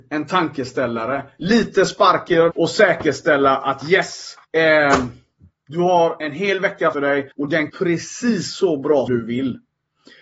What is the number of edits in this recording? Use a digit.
6